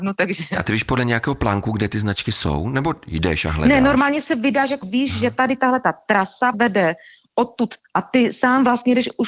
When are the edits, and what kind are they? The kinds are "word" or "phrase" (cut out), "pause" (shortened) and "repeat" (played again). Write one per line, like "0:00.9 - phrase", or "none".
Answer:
0:04.8 - word
0:06.5 - word
0:07.8 - word